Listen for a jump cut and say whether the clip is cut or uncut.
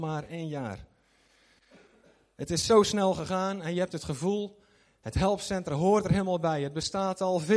uncut